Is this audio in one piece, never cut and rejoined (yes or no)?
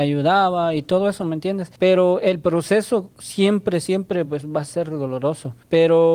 yes